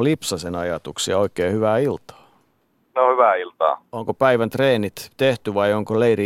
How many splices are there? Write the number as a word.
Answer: zero